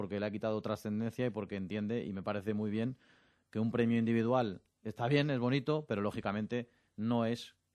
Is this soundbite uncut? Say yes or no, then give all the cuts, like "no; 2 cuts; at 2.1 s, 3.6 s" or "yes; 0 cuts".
yes; 0 cuts